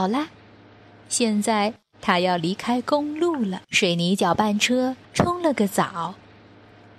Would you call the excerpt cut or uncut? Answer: cut